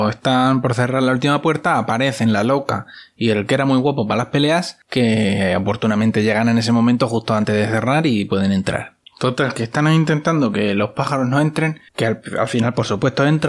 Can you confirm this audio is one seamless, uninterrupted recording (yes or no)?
no